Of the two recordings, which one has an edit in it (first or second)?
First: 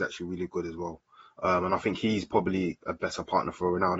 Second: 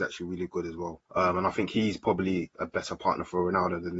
second